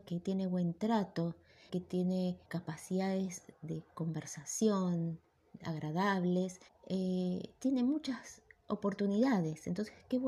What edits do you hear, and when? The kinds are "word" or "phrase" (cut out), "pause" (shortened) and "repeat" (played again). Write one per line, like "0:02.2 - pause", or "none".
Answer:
0:01.7 - word
0:02.4 - pause
0:06.7 - pause